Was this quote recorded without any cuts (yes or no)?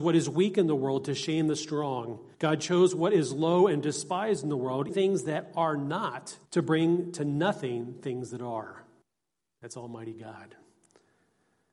no